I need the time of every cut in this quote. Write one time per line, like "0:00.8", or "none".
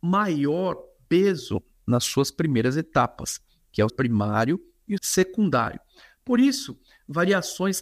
0:03.9
0:05.0